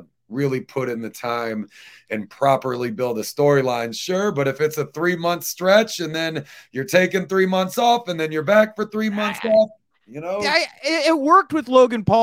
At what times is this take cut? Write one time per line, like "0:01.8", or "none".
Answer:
none